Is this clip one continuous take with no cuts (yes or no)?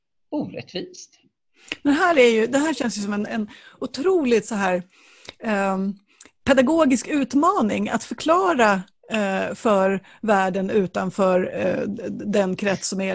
yes